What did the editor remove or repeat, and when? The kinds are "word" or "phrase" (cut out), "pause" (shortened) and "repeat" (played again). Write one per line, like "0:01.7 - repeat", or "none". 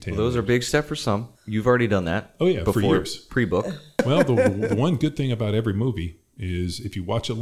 0:01.3 - pause
0:03.9 - pause